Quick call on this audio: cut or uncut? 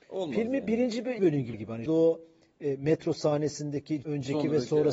cut